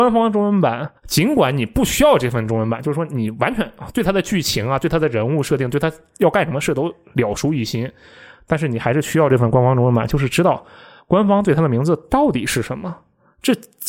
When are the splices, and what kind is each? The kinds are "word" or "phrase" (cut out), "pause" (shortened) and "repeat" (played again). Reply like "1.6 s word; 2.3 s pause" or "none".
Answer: 1.0 s pause